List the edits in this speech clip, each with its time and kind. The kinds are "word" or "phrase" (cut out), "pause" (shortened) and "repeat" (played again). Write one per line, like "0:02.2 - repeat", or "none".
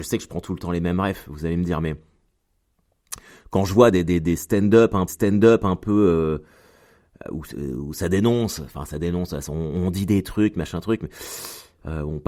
0:05.1 - repeat
0:07.2 - word